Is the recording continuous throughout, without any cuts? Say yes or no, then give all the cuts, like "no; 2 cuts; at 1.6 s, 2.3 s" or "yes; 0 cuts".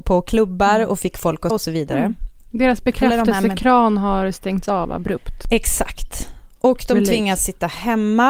no; 1 cut; at 1.5 s